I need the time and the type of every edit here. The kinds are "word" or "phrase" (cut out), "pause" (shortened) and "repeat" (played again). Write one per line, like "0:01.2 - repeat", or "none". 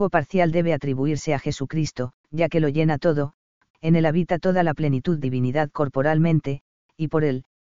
0:02.2 - pause
0:03.7 - word
0:05.2 - word